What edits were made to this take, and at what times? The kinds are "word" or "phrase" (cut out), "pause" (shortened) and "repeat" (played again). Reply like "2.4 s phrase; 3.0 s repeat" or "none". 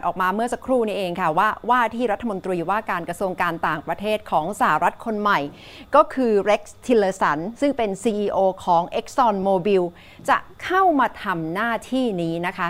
none